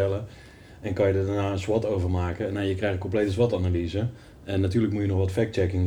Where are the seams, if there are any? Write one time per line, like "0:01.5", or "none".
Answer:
none

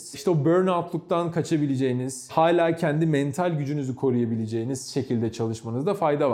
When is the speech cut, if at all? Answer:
none

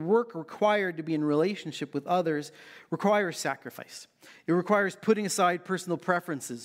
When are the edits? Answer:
none

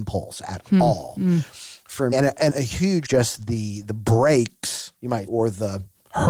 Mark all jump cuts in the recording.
0:02.1
0:02.5
0:03.0
0:05.0
0:05.3

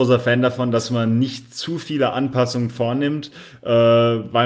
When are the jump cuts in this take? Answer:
none

